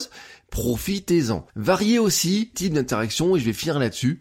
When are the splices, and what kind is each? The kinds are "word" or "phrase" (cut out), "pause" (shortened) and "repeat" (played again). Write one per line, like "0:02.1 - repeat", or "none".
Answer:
0:01.5 - pause
0:02.5 - word